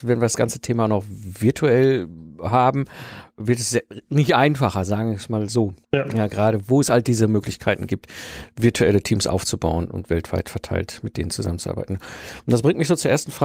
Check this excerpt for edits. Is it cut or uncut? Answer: cut